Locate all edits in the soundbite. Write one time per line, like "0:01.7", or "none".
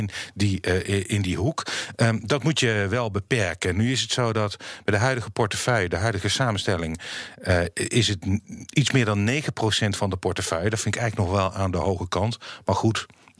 none

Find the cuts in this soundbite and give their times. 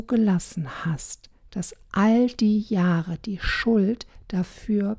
none

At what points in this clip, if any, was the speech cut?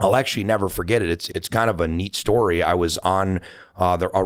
0:01.3

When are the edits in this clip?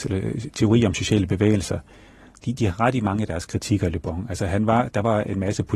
none

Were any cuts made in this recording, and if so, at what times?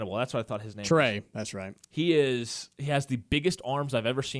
0:01.8

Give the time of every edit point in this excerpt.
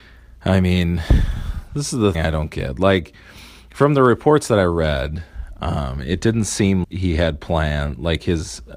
0:02.1
0:06.8

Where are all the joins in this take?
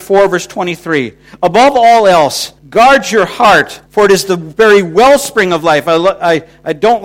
0:02.6
0:03.9

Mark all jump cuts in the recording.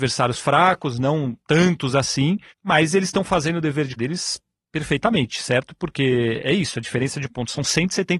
0:01.4
0:02.5
0:04.0
0:06.4

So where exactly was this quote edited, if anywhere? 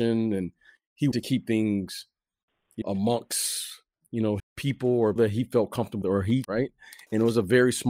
0:01.1
0:02.8
0:04.4
0:05.2
0:06.0
0:06.4

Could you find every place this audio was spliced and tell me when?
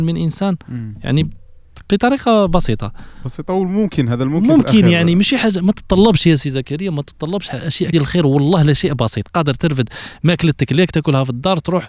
0:07.9

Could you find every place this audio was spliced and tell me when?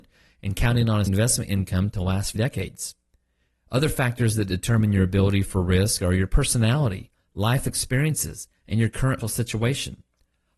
0:01.1
0:02.4
0:09.2

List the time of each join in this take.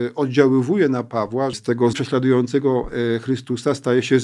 0:01.5
0:01.9

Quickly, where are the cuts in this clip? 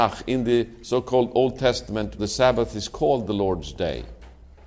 0:02.2

